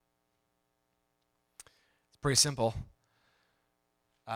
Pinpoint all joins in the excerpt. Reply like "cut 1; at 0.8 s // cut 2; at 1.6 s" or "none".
none